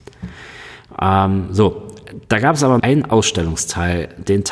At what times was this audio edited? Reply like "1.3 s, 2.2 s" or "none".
2.2 s, 2.8 s